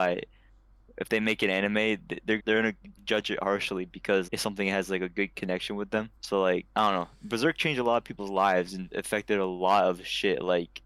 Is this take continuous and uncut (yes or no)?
no